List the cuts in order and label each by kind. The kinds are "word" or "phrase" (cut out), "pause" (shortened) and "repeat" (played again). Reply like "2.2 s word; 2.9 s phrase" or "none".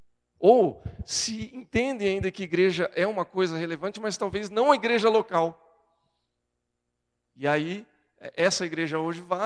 none